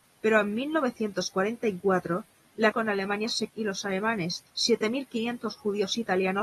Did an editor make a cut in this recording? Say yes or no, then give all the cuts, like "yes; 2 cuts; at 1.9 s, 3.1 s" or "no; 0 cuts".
yes; 3 cuts; at 2.7 s, 3.5 s, 4.4 s